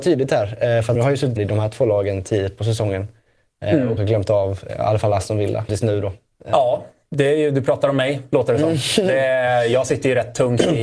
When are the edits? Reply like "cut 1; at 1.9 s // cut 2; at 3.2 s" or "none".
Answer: cut 1; at 0.9 s // cut 2; at 1.4 s // cut 3; at 4.0 s // cut 4; at 4.7 s // cut 5; at 5.7 s

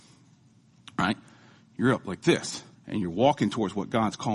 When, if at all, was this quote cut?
cut 1; at 2.7 s

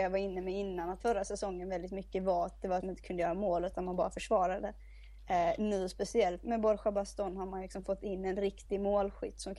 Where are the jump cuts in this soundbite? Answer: cut 1; at 1.0 s // cut 2; at 2.8 s // cut 3; at 6.4 s

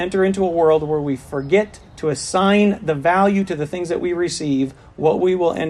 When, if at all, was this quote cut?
cut 1; at 1.9 s

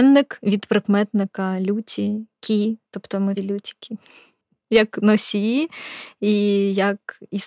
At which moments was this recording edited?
cut 1; at 2.8 s // cut 2; at 3.4 s

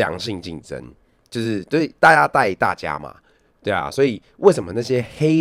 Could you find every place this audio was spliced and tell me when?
none

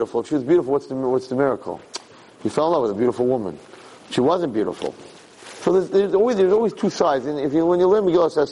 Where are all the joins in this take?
none

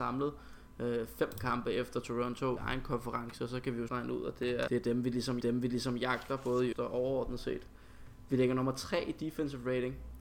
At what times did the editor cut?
cut 1; at 2.6 s // cut 2; at 3.9 s // cut 3; at 4.7 s // cut 4; at 5.4 s // cut 5; at 6.7 s

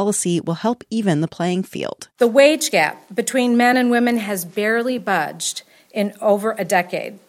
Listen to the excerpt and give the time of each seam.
none

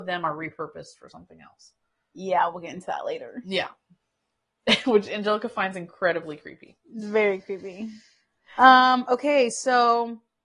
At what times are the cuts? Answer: none

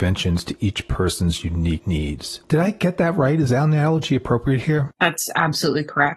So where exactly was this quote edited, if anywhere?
none

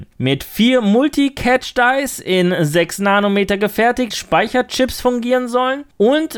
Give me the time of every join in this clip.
cut 1; at 4.1 s

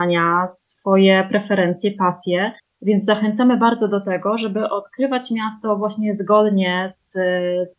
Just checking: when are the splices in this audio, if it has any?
cut 1; at 2.6 s

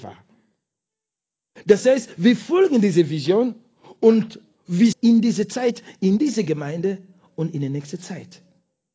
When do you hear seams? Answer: cut 1; at 4.9 s

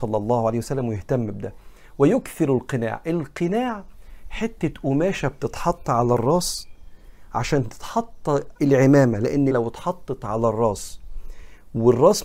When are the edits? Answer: cut 1; at 8.6 s // cut 2; at 9.5 s

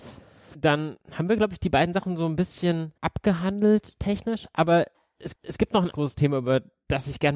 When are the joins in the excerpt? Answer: cut 1; at 1.0 s // cut 2; at 3.0 s // cut 3; at 5.3 s // cut 4; at 5.9 s

